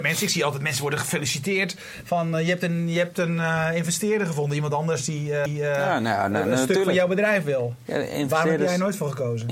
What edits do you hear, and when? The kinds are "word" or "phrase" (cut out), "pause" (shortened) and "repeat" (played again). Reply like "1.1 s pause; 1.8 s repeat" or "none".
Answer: 5.5 s repeat